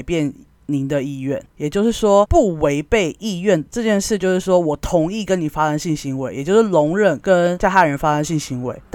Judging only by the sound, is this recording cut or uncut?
cut